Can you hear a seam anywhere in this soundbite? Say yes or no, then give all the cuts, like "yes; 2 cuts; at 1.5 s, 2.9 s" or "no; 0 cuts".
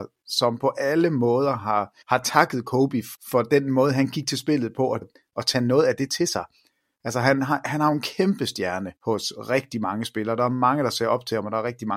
yes; 4 cuts; at 2.0 s, 3.1 s, 5.0 s, 9.0 s